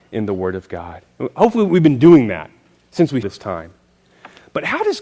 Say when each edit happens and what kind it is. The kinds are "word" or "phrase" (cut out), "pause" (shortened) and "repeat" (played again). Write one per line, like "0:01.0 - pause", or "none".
0:03.2 - word